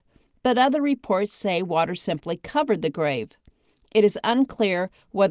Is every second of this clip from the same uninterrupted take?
yes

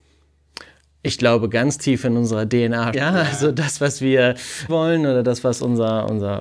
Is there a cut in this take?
yes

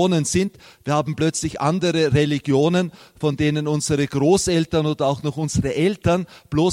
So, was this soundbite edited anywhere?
no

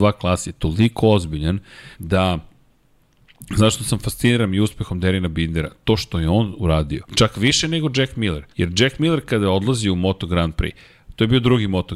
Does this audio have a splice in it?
yes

